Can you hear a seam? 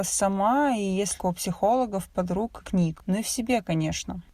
yes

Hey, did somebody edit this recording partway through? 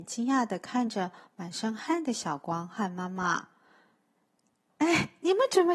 no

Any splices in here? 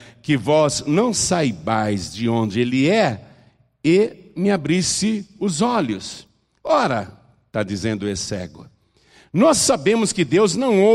no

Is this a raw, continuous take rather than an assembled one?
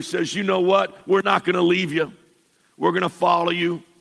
yes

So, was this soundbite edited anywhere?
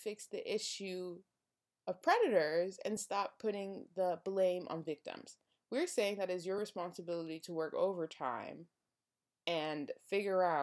no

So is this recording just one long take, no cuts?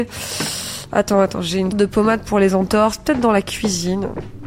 no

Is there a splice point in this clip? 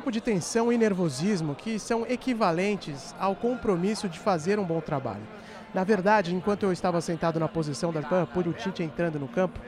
yes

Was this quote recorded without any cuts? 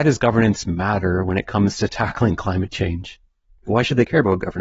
yes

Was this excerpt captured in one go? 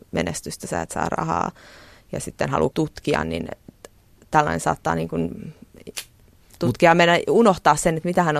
no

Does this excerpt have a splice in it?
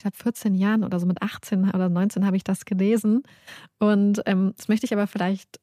no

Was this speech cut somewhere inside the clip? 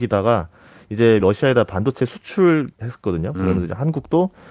yes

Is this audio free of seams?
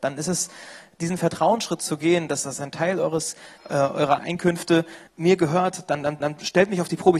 no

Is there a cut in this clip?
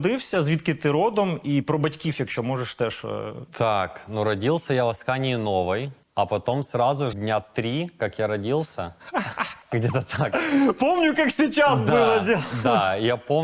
yes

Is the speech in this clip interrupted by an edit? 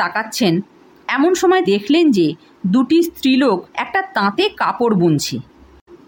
yes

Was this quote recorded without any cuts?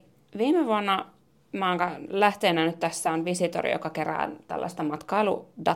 yes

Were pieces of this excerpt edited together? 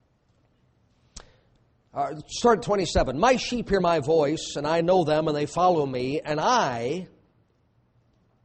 no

